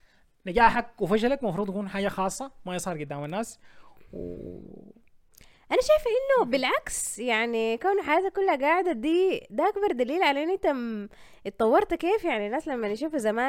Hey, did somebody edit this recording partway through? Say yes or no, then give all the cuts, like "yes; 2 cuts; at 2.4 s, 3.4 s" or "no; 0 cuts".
no; 0 cuts